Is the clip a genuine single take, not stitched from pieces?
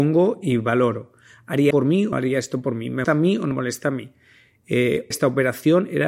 no; 5 cuts; at 1.7 s, 2.1 s, 3.0 s, 3.5 s, 5.1 s

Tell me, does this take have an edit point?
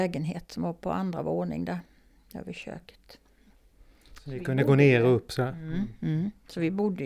no; 0 cuts

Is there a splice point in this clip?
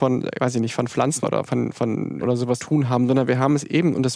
yes; 3 cuts; at 1.2 s, 2.2 s, 2.6 s

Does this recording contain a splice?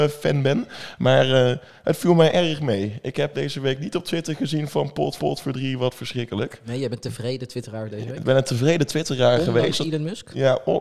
yes; 2 cuts; at 3.3 s, 5.2 s

